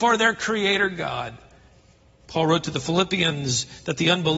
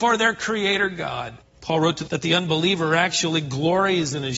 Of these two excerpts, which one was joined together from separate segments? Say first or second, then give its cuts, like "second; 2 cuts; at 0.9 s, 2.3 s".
second; 2 cuts; at 1.4 s, 2.1 s